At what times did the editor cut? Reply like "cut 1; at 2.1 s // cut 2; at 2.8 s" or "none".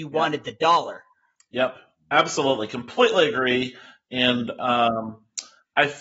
none